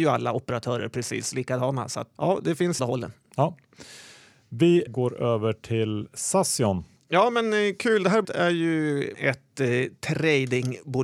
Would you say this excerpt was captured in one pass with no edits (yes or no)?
no